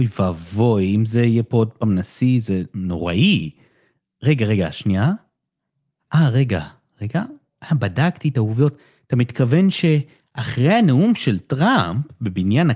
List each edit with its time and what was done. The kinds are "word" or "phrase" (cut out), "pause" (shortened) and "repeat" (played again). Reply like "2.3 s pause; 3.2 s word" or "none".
none